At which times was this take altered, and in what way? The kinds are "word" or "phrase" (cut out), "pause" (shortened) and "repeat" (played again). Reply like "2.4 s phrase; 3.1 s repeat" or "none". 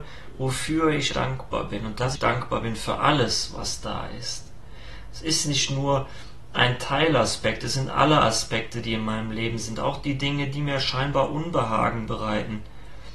1.1 s word; 2.2 s word